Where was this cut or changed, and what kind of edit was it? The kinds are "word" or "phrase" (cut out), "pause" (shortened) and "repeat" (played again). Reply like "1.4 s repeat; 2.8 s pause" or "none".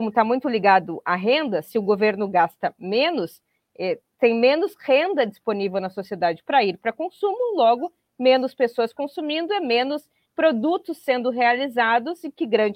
none